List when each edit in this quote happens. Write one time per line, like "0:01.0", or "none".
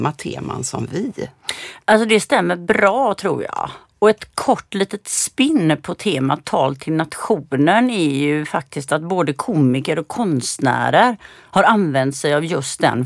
none